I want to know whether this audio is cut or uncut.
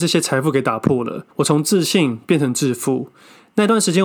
cut